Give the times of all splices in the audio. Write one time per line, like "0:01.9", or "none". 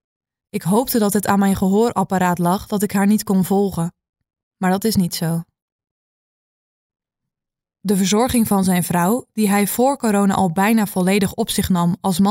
none